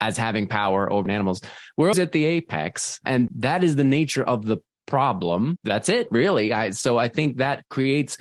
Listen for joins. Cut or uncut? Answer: cut